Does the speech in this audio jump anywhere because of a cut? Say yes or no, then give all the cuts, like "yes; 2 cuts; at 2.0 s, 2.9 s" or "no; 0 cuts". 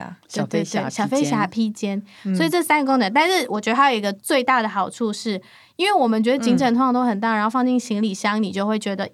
no; 0 cuts